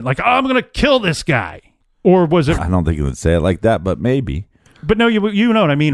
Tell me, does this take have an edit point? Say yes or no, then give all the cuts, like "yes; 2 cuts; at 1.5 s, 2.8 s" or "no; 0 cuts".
yes; 1 cut; at 2.6 s